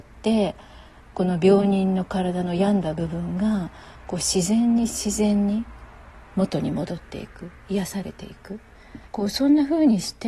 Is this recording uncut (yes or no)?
no